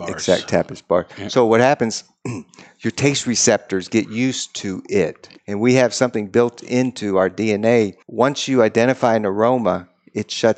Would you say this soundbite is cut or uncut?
cut